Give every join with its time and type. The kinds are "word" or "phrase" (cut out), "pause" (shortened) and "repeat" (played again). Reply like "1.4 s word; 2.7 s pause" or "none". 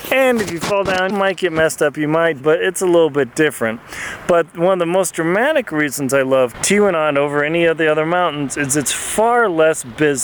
1.1 s word; 2.4 s word; 6.5 s word